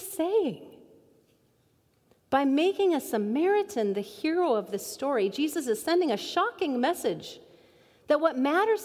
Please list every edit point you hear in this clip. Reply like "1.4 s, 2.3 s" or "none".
none